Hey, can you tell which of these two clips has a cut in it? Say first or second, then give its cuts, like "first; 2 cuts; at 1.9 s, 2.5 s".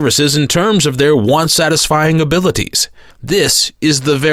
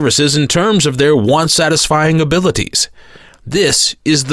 first; 1 cut; at 3.1 s